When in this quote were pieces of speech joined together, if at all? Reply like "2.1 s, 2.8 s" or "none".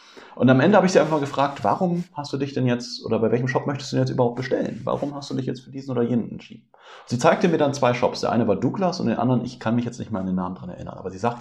none

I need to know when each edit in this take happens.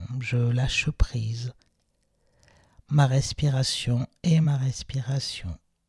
none

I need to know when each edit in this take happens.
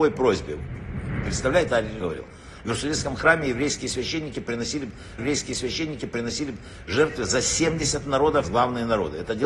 1.7 s, 2.0 s, 5.2 s, 8.4 s

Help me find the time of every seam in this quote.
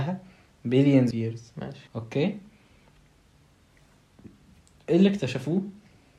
1.1 s, 1.9 s

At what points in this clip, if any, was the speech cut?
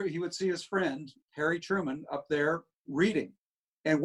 1.2 s

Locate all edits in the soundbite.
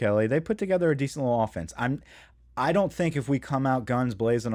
none

